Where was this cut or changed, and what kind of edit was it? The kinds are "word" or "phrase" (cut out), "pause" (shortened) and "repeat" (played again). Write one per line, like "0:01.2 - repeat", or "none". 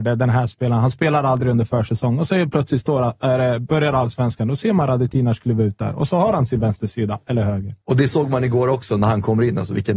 0:07.8 - pause